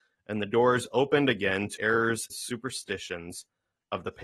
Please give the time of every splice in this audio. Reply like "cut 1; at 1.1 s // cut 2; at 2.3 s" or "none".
cut 1; at 1.8 s // cut 2; at 2.3 s